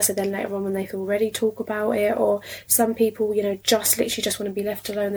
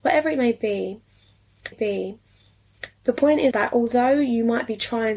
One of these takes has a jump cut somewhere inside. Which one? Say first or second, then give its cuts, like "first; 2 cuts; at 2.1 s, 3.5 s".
second; 2 cuts; at 1.7 s, 3.5 s